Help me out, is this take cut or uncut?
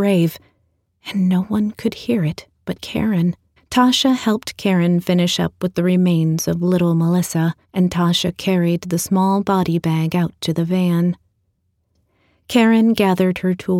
cut